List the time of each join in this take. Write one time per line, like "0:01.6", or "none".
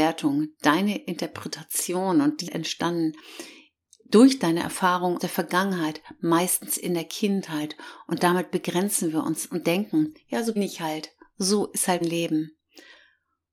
0:02.5
0:05.2
0:10.6
0:12.0